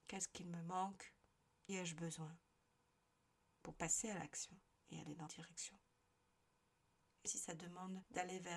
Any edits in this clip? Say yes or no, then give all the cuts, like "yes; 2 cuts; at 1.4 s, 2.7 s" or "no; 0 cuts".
yes; 4 cuts; at 1.7 s, 3.7 s, 5.3 s, 7.2 s